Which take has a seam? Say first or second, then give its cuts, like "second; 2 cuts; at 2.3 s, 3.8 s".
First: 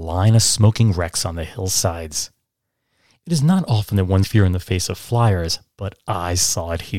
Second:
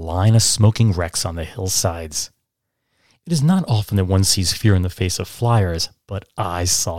first; 1 cut; at 4.2 s